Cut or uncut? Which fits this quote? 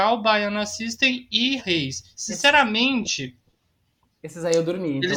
cut